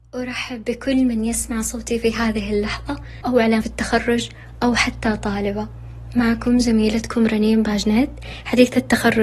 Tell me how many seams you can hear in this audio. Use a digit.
2